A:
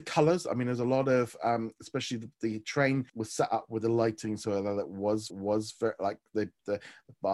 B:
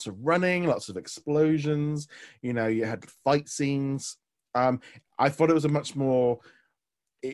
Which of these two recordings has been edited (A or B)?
A